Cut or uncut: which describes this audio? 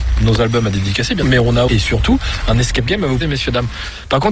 cut